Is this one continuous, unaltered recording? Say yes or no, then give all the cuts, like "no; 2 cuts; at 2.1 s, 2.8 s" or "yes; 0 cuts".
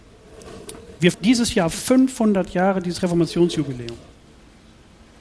no; 1 cut; at 1.1 s